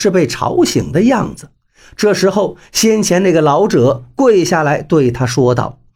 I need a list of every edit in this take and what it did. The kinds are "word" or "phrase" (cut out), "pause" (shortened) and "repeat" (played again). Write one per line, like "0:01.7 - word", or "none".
none